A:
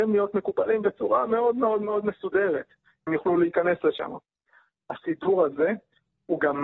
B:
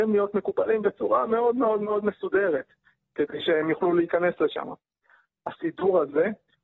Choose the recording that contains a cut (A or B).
A